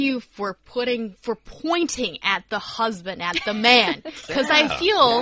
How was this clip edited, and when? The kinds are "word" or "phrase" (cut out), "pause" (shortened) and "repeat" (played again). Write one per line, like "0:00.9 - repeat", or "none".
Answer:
0:01.2 - word